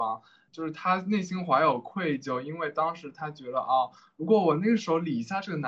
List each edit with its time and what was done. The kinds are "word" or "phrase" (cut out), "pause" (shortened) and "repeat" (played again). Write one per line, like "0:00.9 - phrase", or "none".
none